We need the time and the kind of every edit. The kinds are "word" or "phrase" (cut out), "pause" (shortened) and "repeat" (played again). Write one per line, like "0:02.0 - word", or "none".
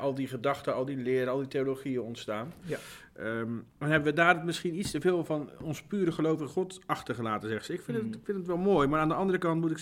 0:03.7 - pause

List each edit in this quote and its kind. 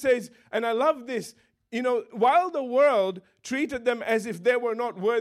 none

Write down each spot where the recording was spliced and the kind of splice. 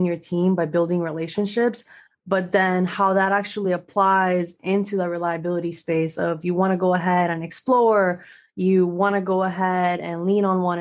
none

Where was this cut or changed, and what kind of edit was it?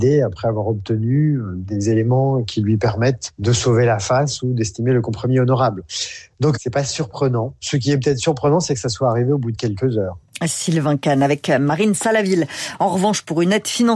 none

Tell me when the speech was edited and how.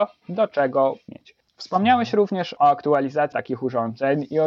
0:01.1 - word
0:01.4 - pause
0:02.6 - word
0:03.3 - word

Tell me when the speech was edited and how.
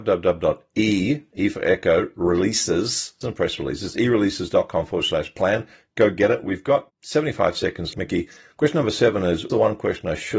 0:03.2 - word
0:07.9 - word
0:09.5 - word

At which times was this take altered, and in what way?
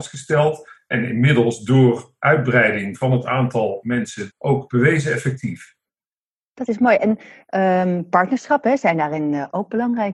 0:04.3 - phrase

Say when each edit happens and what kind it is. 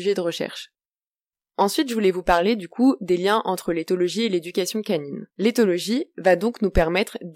0:05.3 - pause

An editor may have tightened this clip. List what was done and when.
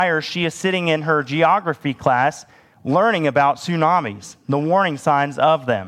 none

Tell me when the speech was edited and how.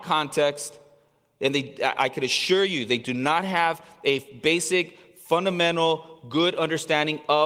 none

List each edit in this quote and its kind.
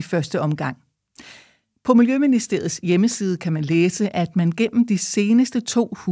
none

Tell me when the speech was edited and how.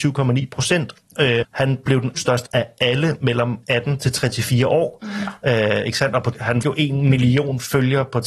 0:01.4 - word
0:02.1 - word
0:02.5 - word
0:06.3 - word
0:06.6 - word

